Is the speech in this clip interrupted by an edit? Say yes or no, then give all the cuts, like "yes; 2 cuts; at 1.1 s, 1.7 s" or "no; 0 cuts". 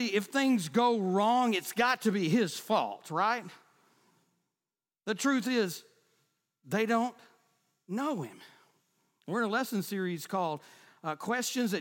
no; 0 cuts